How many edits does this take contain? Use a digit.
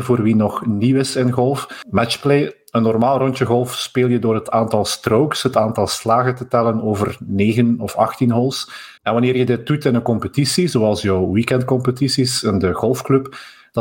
1